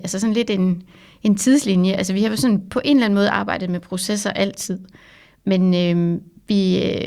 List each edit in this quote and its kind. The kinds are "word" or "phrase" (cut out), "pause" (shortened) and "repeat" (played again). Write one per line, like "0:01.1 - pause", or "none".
none

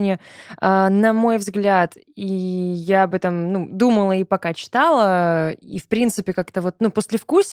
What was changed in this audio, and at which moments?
none

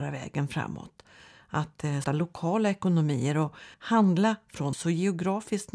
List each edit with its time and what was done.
0:02.0 - word
0:03.7 - pause
0:04.7 - word

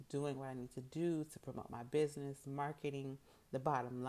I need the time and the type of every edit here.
none

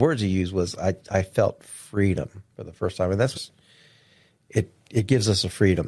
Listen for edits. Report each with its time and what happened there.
0:02.5 - pause
0:03.3 - phrase

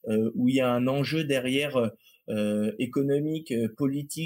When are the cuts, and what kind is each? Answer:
none

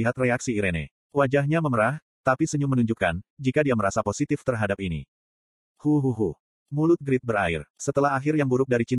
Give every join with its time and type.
none

